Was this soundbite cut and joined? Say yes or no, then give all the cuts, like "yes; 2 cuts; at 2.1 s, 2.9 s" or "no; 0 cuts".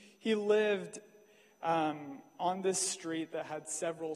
no; 0 cuts